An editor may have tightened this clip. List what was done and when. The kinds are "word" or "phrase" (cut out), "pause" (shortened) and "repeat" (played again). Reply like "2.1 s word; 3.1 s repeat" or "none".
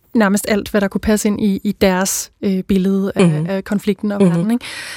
none